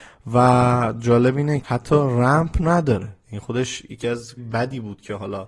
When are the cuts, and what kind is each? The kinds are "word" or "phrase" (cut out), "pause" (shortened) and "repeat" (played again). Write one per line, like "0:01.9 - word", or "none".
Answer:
0:01.6 - word
0:03.2 - pause
0:04.4 - word